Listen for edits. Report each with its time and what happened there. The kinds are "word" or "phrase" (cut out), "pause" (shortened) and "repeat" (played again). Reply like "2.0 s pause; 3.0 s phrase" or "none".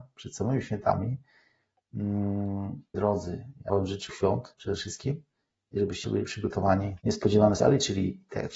2.9 s word; 3.7 s word; 4.1 s word; 4.5 s word; 6.0 s word; 7.0 s word; 7.6 s word